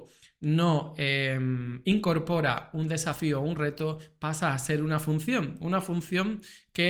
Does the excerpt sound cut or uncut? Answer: uncut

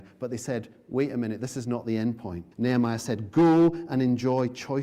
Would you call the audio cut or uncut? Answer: cut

